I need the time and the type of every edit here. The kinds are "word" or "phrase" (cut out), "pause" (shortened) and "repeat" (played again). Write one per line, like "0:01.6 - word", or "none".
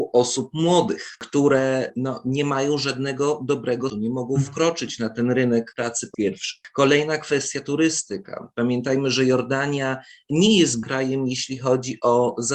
0:03.9 - word
0:05.7 - word
0:06.1 - word
0:10.8 - word